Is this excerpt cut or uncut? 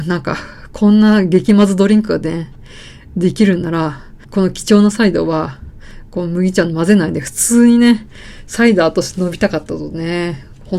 cut